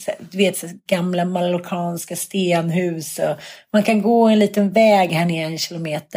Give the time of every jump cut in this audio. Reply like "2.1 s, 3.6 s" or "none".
none

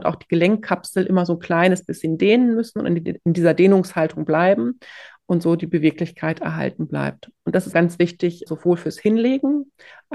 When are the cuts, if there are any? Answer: 7.7 s, 8.5 s

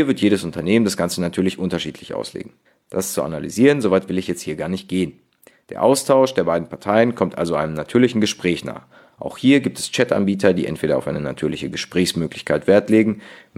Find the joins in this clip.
2.7 s

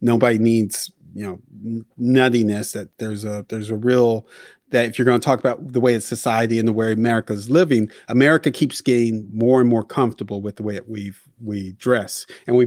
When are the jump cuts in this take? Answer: none

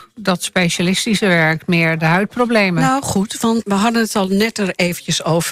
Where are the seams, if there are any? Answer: 3.6 s

